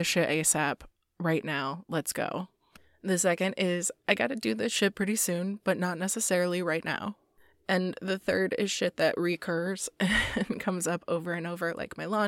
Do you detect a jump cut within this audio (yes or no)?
no